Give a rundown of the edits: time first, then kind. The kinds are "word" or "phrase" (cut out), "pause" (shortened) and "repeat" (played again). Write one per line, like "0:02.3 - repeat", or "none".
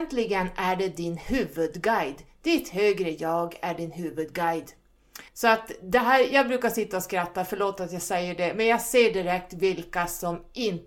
0:05.3 - pause

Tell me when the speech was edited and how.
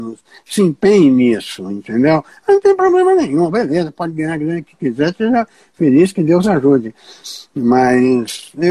none

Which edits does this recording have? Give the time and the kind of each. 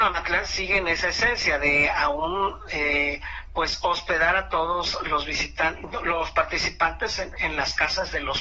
none

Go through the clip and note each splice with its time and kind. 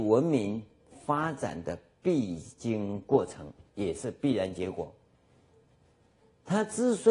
none

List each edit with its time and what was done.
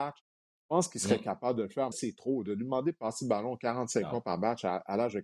0:01.9 - word

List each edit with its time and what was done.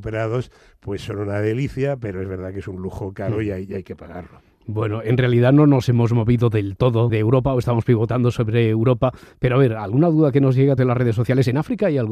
0:07.1 - word
0:10.8 - phrase

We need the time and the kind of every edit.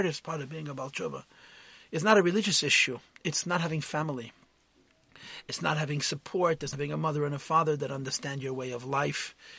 0:06.7 - word

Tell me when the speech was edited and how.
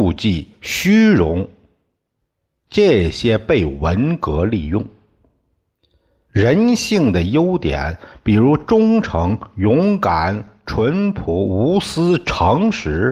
none

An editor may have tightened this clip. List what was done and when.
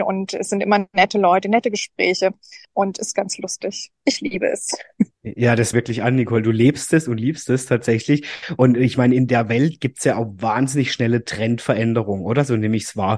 0:02.6 - pause
0:05.1 - pause
0:05.7 - phrase

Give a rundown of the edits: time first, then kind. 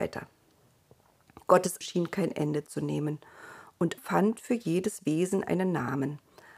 0:01.8 - word
0:04.0 - word

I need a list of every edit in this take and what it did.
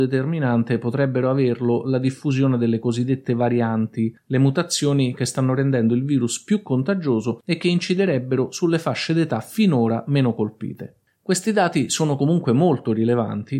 none

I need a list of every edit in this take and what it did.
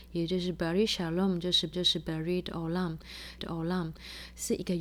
0:01.7 - repeat
0:03.4 - repeat

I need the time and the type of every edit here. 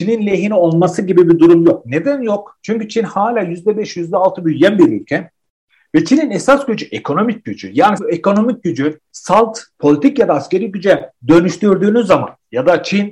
0:08.0 - word
0:09.1 - pause
0:11.2 - pause

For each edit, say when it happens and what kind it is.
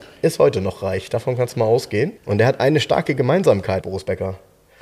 0:02.2 - pause
0:03.8 - word

